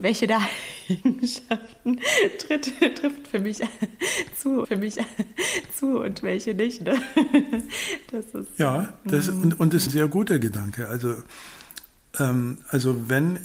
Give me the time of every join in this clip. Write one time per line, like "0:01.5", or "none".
0:04.6
0:09.9